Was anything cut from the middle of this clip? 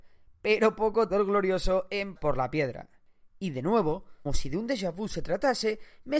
yes; 3 cuts; at 1.1 s, 2.2 s, 4.3 s

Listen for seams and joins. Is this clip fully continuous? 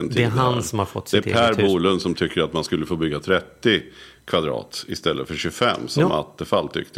yes; 0 cuts

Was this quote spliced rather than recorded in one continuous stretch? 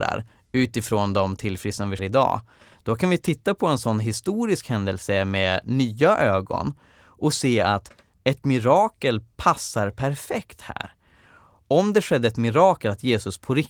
yes; 1 cut; at 2.0 s

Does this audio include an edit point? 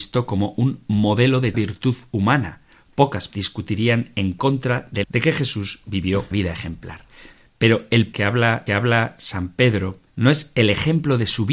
yes; 7 cuts; at 1.5 s, 3.3 s, 5.0 s, 6.3 s, 8.1 s, 8.7 s, 10.1 s

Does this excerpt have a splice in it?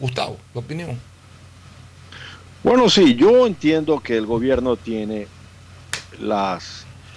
no; 0 cuts

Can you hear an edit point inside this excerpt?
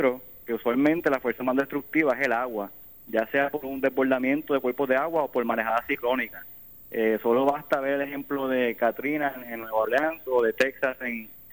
no; 0 cuts

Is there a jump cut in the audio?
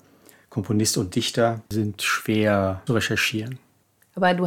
yes; 2 cuts; at 1.7 s, 2.9 s

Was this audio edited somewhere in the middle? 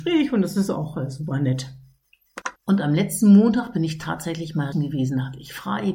yes; 2 cuts; at 2.6 s, 4.7 s

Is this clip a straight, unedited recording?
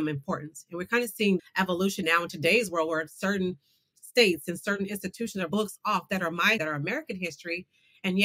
no; 4 cuts; at 1.4 s, 2.0 s, 5.5 s, 6.6 s

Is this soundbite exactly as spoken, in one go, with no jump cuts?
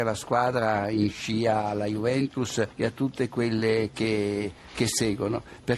no; 1 cut; at 2.7 s

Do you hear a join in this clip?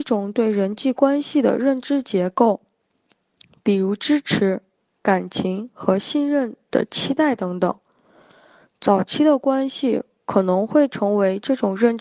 no; 0 cuts

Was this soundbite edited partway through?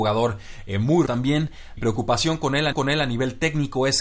yes; 3 cuts; at 1.1 s, 1.8 s, 2.7 s

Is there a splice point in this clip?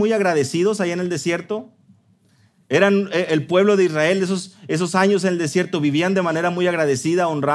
no; 0 cuts

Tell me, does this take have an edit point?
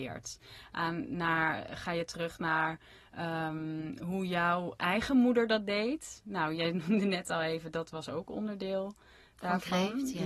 no; 0 cuts

